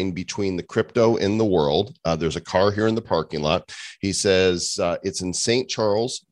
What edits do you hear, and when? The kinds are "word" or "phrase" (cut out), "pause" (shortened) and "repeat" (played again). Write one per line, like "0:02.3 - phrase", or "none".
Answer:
none